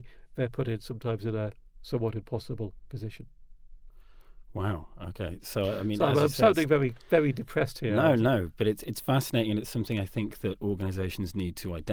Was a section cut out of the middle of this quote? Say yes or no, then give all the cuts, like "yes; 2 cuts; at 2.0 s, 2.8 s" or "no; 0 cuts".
no; 0 cuts